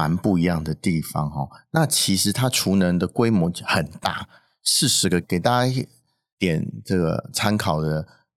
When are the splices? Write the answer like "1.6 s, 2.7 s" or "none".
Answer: 5.2 s